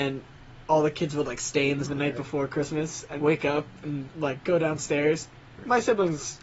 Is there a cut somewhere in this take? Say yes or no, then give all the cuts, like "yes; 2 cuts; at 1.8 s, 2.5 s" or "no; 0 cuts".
yes; 2 cuts; at 1.8 s, 3.2 s